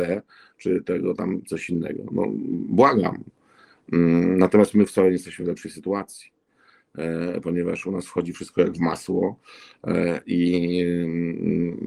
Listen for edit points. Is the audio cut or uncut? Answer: uncut